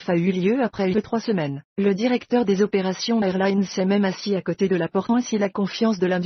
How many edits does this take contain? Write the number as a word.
four